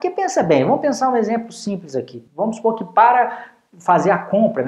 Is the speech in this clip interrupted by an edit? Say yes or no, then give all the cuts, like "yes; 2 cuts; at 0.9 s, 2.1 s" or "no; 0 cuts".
yes; 1 cut; at 2.3 s